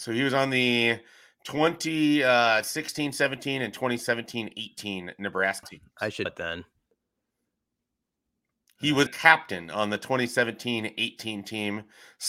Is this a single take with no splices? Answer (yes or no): no